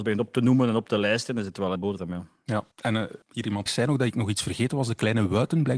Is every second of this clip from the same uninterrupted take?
no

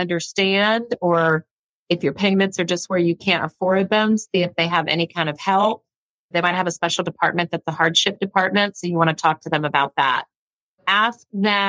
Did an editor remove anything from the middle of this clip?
no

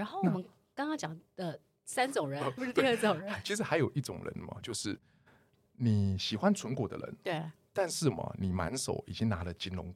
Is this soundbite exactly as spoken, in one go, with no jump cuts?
no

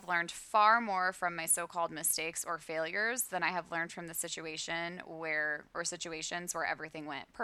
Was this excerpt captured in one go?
yes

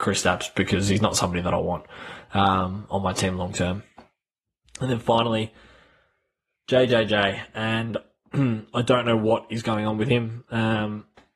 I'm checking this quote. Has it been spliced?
no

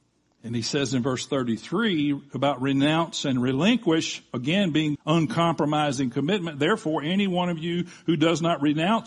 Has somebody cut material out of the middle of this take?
yes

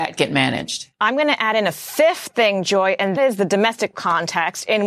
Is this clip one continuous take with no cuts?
no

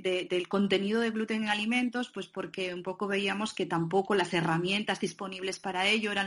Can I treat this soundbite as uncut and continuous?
yes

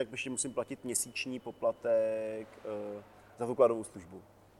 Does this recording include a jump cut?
no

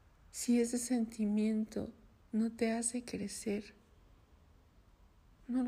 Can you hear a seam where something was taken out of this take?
no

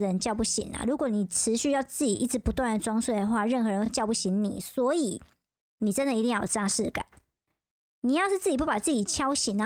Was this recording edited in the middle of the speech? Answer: no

